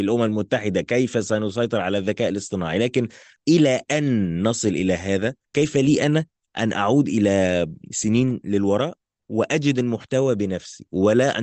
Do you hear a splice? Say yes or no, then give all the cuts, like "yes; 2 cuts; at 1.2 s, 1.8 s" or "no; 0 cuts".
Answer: no; 0 cuts